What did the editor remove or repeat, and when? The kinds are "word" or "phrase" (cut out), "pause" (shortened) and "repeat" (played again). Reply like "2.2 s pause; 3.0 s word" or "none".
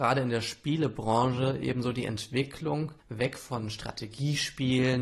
3.0 s pause